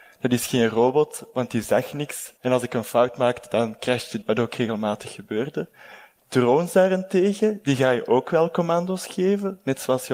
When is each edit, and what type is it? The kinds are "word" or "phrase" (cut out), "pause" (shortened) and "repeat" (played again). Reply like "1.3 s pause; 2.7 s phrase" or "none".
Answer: 2.4 s pause; 4.2 s word